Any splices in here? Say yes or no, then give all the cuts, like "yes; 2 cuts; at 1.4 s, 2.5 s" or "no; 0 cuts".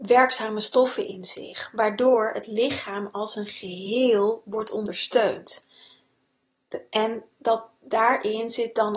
no; 0 cuts